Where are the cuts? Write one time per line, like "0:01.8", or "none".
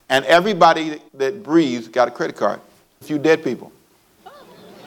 0:01.1
0:03.0